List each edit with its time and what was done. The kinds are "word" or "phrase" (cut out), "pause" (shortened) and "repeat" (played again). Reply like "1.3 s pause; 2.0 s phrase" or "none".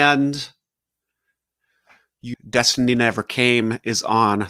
2.3 s word